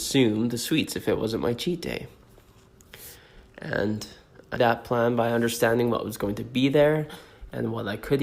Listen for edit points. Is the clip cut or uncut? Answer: cut